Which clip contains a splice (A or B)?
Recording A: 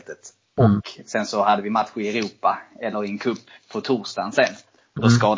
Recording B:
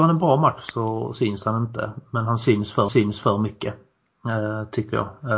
B